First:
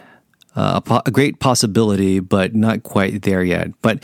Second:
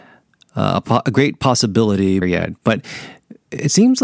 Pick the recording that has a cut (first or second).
second